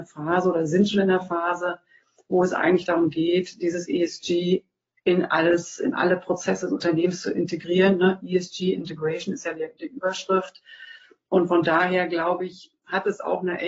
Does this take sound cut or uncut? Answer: uncut